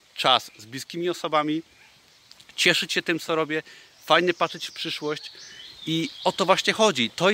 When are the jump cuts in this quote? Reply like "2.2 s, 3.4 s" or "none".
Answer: none

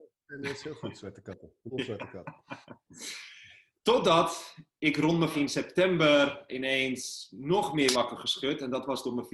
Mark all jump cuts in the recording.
1.7 s, 3.7 s, 5.3 s, 6.5 s, 7.9 s

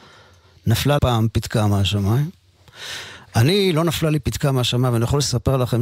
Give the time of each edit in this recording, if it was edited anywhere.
1.0 s

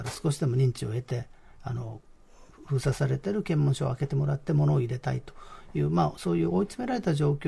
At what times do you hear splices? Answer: none

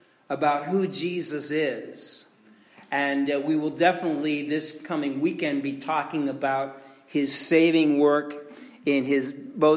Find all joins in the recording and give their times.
none

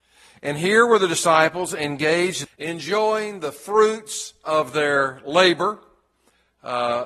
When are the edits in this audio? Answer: 2.4 s, 4.5 s

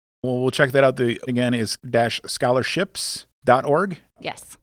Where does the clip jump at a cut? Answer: 1.3 s, 1.8 s

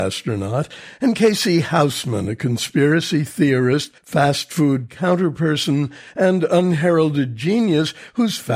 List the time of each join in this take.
4.0 s

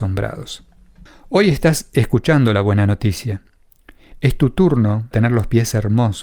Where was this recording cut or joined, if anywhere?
1.1 s, 5.1 s

